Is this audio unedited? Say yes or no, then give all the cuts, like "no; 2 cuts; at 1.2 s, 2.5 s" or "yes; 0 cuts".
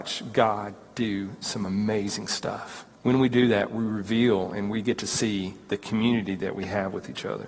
no; 1 cut; at 2.9 s